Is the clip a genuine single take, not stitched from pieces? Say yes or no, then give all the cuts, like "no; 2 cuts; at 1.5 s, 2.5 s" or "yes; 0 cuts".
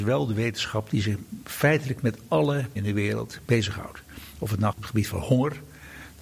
no; 2 cuts; at 2.8 s, 4.7 s